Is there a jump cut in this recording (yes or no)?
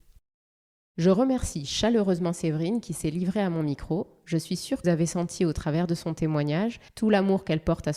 yes